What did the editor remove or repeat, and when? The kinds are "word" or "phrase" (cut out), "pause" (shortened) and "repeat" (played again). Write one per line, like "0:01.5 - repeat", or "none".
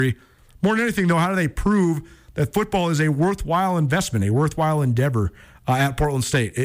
none

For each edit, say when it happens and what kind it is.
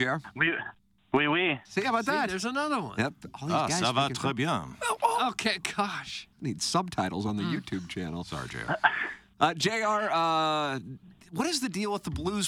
0:01.6 - pause
0:06.3 - pause

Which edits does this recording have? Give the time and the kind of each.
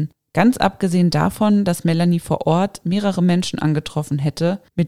none

